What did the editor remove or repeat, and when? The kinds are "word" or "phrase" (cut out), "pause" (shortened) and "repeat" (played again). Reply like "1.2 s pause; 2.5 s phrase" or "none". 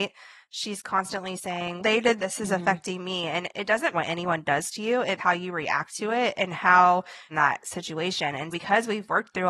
1.8 s word; 2.2 s phrase; 3.9 s word; 5.2 s word; 7.3 s phrase; 8.5 s word